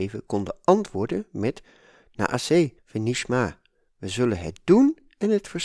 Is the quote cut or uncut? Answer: cut